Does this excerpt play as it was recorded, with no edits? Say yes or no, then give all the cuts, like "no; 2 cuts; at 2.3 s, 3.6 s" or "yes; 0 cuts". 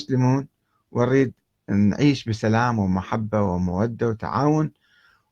yes; 0 cuts